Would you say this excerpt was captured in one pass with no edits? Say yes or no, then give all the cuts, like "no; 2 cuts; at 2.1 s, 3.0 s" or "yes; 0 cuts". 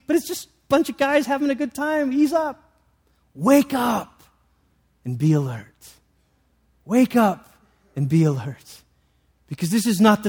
yes; 0 cuts